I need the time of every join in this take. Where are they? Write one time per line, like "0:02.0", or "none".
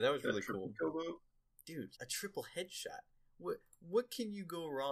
0:01.9

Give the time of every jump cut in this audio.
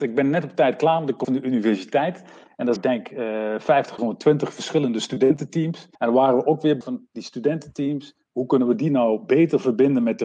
0:01.2
0:02.8
0:04.0
0:05.9
0:06.8

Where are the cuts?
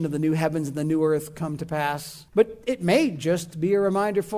0:02.3

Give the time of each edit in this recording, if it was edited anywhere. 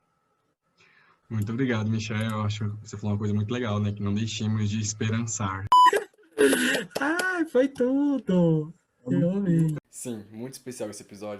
none

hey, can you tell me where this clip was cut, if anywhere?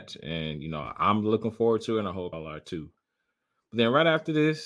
0:02.3

